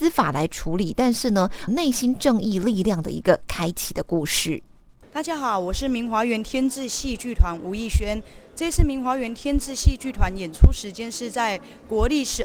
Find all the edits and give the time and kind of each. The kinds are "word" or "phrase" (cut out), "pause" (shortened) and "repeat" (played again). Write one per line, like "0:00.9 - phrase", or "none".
0:01.7 - word